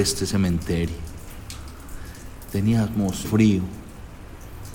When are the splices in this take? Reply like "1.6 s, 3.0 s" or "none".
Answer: 3.2 s